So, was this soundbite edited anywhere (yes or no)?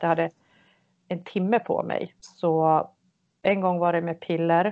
yes